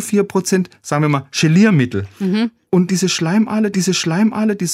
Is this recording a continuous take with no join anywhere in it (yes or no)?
no